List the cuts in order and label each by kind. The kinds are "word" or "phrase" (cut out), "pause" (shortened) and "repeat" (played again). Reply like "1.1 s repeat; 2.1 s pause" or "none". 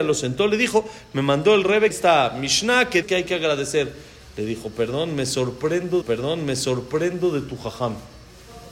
1.9 s phrase; 3.0 s word; 6.0 s repeat